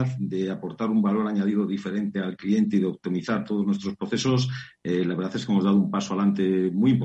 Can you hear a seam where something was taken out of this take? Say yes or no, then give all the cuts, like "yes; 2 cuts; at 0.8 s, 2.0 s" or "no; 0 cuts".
no; 0 cuts